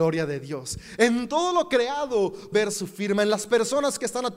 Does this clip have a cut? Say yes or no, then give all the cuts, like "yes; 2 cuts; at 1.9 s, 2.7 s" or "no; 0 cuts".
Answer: yes; 1 cut; at 2.5 s